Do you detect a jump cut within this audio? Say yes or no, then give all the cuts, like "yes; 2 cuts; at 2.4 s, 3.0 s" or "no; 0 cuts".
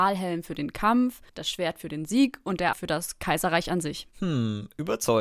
yes; 3 cuts; at 1.3 s, 2.7 s, 4.1 s